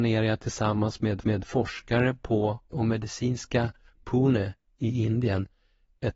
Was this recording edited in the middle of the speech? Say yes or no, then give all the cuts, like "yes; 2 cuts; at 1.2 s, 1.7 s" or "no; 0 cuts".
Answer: yes; 3 cuts; at 1.2 s, 2.7 s, 4.0 s